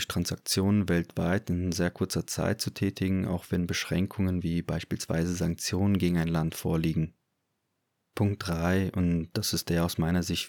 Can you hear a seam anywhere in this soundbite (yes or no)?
no